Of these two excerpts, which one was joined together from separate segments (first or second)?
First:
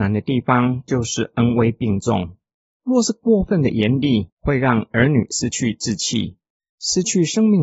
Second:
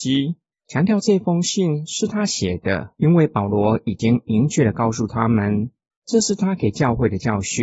second